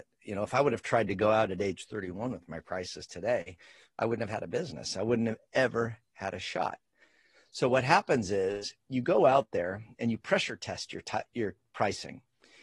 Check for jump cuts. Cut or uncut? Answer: uncut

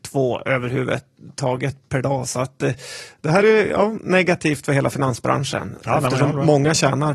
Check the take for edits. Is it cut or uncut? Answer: cut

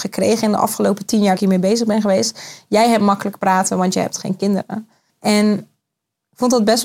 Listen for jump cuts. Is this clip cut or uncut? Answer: cut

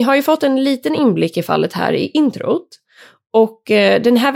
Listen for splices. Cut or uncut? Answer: uncut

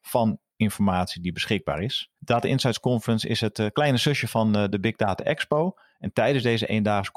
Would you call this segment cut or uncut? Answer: uncut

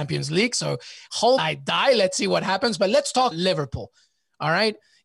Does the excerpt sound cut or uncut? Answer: cut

